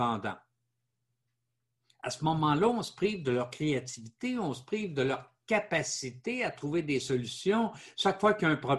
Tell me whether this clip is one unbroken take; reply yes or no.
yes